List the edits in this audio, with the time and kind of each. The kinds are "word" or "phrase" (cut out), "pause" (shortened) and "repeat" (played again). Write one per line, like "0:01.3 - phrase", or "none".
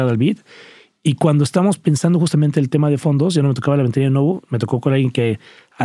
none